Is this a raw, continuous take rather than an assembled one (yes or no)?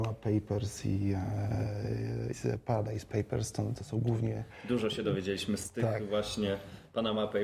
no